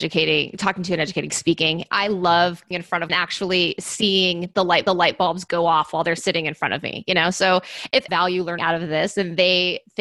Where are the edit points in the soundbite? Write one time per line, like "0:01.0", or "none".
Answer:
0:01.3
0:02.7
0:03.1
0:04.9
0:08.1
0:08.6